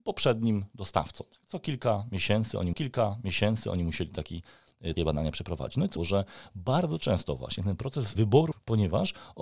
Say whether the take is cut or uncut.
cut